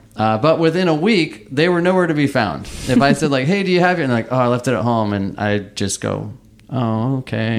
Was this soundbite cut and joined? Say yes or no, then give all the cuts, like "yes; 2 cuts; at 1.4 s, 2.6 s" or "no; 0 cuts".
no; 0 cuts